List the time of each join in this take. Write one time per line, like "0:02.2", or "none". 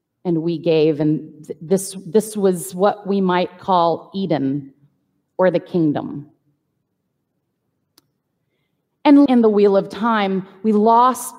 0:09.3

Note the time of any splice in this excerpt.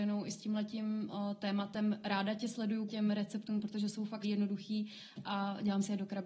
0:02.9
0:04.2

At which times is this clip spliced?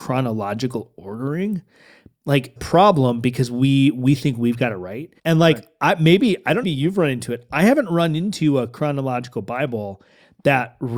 0:02.6
0:05.2
0:06.6

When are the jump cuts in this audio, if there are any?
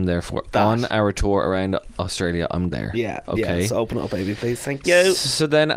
0:02.7

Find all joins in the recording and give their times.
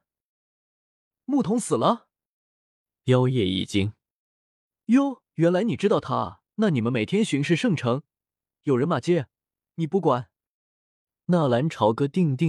0:05.3
0:06.5

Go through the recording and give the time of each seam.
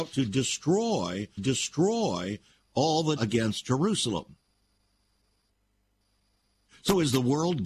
0:01.4
0:03.2

